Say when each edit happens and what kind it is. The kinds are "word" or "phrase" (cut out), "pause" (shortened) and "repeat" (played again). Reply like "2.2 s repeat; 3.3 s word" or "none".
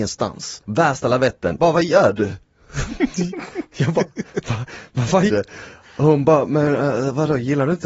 1.6 s word; 5.3 s word